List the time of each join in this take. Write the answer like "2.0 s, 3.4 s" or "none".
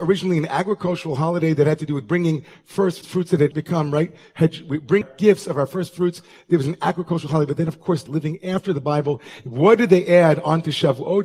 3.0 s, 3.5 s, 5.0 s, 8.1 s